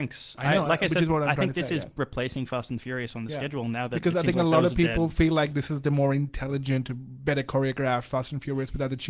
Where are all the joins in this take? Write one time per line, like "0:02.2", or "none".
none